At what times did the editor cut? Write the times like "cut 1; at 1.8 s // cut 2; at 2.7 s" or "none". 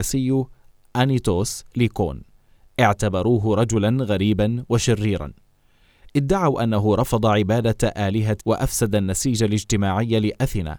cut 1; at 1.7 s // cut 2; at 8.4 s